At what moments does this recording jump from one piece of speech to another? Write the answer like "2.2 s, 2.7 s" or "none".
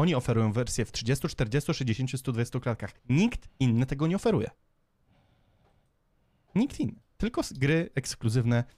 3.0 s